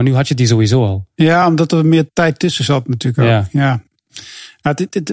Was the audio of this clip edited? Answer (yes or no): no